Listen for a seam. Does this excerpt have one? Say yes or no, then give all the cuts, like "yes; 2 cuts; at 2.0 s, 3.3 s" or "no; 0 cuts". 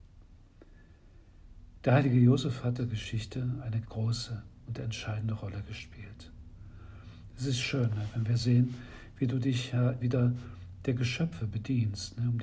yes; 3 cuts; at 2.8 s, 3.8 s, 10.0 s